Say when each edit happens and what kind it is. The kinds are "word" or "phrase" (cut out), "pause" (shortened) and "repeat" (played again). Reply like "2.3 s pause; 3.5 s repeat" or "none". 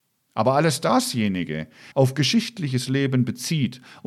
1.9 s phrase